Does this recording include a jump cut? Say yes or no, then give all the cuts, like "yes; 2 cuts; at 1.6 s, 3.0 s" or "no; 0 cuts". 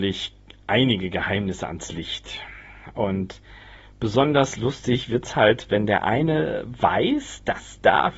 no; 0 cuts